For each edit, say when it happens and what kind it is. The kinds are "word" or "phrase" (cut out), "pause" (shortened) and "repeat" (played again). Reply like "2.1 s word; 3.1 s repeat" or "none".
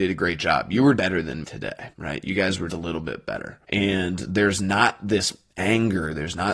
1.0 s word; 1.4 s word; 1.9 s pause; 2.7 s word; 3.6 s pause